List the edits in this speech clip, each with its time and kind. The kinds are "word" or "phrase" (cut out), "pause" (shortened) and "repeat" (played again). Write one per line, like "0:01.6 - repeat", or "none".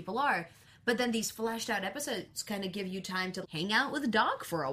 0:03.4 - word